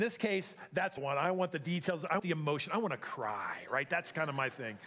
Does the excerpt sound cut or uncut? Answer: cut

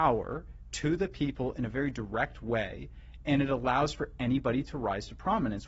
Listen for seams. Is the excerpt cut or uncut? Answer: uncut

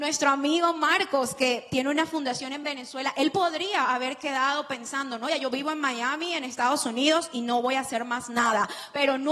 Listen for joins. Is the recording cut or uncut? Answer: uncut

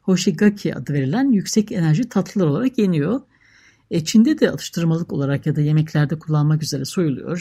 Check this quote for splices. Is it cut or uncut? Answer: uncut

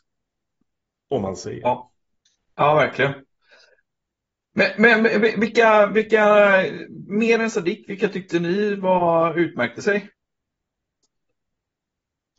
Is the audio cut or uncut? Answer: uncut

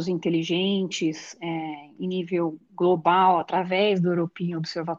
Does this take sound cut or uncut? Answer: uncut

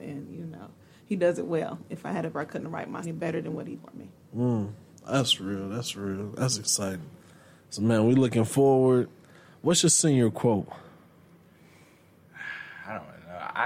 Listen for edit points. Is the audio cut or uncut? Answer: cut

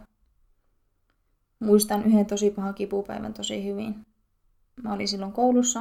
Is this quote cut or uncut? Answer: uncut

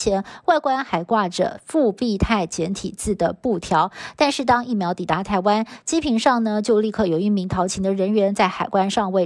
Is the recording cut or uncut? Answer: uncut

